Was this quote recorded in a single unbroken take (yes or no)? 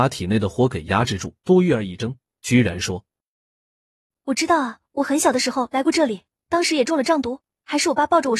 no